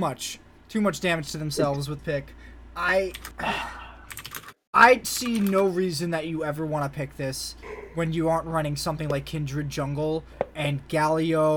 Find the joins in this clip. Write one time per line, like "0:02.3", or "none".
0:02.0